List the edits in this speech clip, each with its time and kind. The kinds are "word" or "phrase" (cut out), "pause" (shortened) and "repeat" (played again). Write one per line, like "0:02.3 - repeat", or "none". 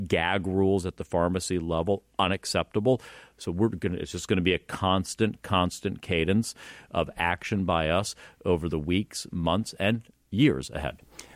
none

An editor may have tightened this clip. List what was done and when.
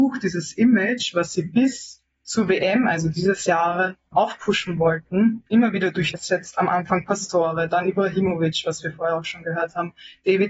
0:04.1 - word
0:05.5 - pause
0:06.1 - phrase

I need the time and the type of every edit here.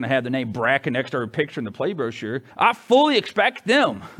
0:02.5 - pause

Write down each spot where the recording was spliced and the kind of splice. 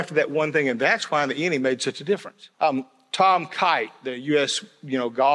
0:02.5 - pause

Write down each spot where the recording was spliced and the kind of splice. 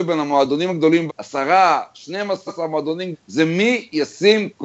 0:01.1 - word
0:02.5 - word
0:03.1 - word

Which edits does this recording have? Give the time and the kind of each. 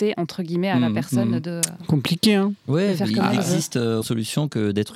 0:04.0 - word

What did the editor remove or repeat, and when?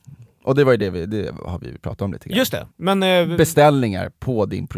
0:02.7 - pause

